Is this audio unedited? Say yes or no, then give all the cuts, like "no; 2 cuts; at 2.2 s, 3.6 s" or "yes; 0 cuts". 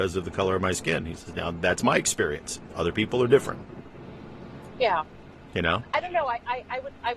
yes; 0 cuts